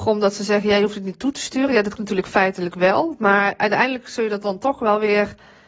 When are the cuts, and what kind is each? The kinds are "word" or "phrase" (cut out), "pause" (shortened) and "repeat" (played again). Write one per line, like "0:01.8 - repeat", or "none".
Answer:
0:02.0 - word